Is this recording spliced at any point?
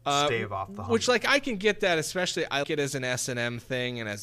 yes; 1 cut; at 2.6 s

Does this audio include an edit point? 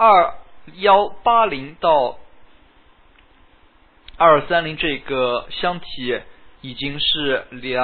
yes; 1 cut; at 6.6 s

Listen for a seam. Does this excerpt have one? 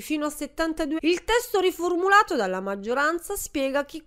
yes; 1 cut; at 1.0 s

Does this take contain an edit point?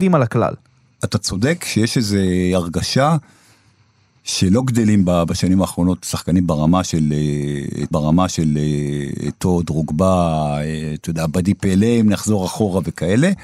yes; 1 cut; at 7.9 s

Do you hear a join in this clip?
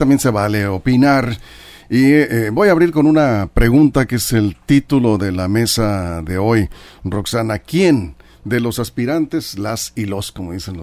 no; 0 cuts

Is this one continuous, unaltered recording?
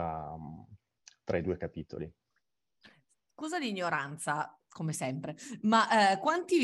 yes; 0 cuts

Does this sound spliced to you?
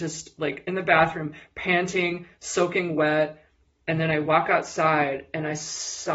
no; 0 cuts

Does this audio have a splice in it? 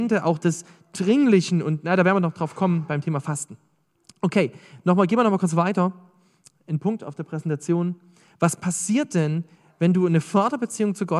no; 0 cuts

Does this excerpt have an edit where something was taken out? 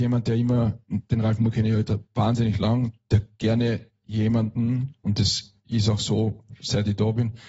no; 0 cuts

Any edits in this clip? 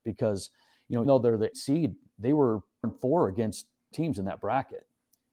yes; 4 cuts; at 1.1 s, 1.5 s, 2.8 s, 3.9 s

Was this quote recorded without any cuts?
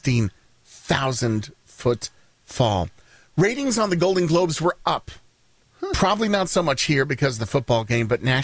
yes; 0 cuts

